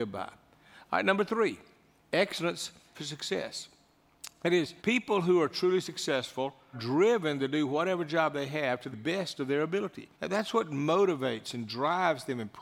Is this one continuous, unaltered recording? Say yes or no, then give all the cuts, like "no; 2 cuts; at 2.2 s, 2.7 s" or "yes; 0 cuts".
no; 5 cuts; at 2.9 s, 4.8 s, 6.7 s, 8.9 s, 10.1 s